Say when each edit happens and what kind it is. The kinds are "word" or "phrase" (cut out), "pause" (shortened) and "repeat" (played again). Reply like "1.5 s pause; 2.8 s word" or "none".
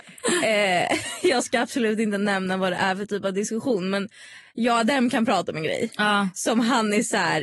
none